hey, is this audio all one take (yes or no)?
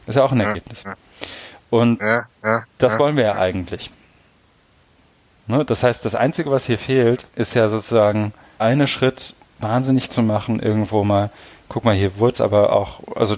no